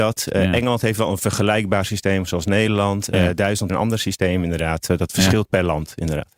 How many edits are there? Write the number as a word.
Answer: one